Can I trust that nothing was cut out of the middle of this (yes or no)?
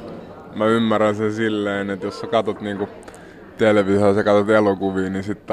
yes